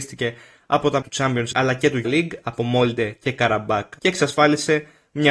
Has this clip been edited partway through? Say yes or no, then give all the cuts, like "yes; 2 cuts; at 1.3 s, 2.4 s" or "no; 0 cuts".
yes; 4 cuts; at 1.0 s, 1.5 s, 2.0 s, 4.0 s